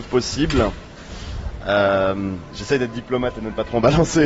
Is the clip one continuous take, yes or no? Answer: yes